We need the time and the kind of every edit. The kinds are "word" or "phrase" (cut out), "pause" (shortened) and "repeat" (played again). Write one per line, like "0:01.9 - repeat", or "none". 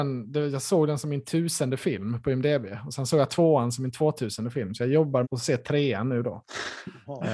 0:05.2 - word

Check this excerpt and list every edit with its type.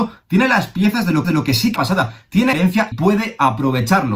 0:01.2 - repeat
0:01.8 - phrase
0:02.5 - word
0:02.9 - word

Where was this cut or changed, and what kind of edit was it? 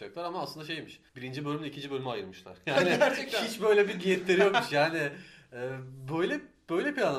0:01.1 - pause

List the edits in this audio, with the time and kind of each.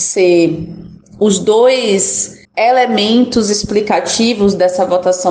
0:02.4 - pause

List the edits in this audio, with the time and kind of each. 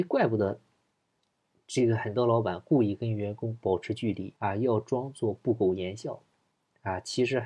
0:04.4 - pause

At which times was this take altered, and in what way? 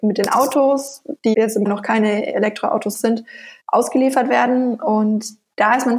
0:01.3 - word
0:01.7 - word
0:02.9 - word
0:03.6 - pause

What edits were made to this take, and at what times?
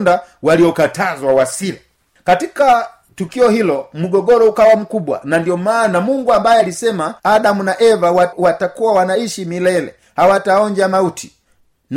0:07.2 - pause

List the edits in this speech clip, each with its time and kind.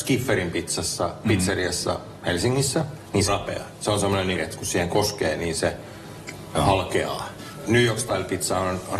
0:03.3 - phrase
0:04.4 - phrase

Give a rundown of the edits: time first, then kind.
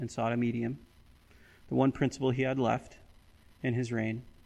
none

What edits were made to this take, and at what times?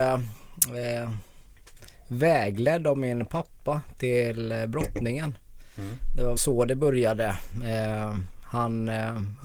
0:06.4 - word

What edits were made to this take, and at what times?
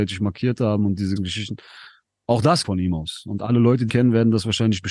0:01.2 - word
0:02.6 - word
0:03.9 - word

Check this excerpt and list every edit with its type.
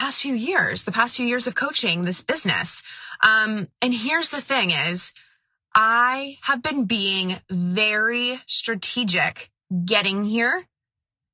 none

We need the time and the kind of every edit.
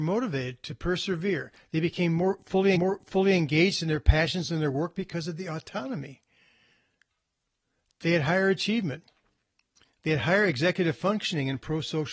0:02.8 - repeat

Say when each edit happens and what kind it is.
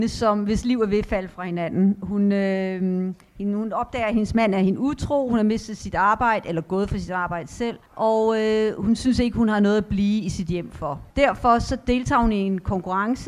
0:07.9 - pause
0:11.1 - pause

